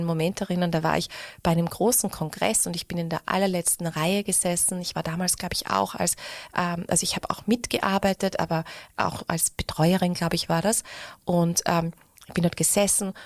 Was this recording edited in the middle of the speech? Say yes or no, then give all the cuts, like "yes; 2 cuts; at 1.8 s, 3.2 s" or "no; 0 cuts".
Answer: no; 0 cuts